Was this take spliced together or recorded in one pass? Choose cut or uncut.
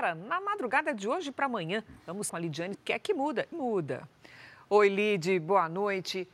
cut